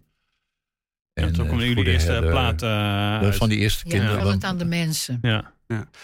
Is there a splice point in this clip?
yes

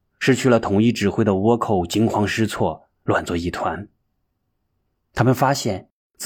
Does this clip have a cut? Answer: no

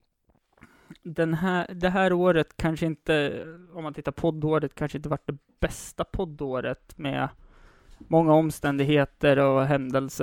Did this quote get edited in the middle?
no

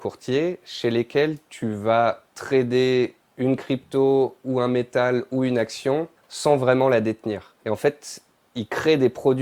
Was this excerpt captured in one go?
no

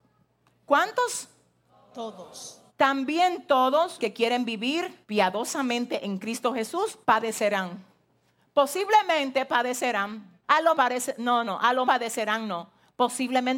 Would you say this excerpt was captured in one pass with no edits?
no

